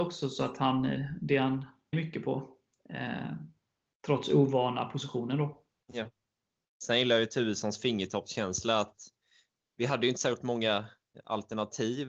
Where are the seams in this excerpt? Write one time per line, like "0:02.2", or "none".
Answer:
0:01.9
0:05.7